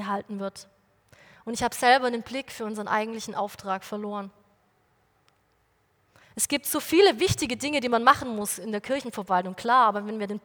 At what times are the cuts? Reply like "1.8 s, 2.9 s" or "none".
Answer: none